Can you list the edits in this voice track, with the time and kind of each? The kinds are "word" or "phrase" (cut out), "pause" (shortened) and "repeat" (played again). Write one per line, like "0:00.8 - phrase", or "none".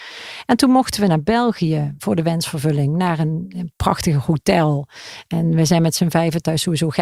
none